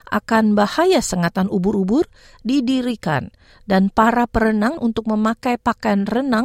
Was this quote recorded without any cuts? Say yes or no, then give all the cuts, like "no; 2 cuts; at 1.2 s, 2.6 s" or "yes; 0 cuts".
no; 1 cut; at 4.8 s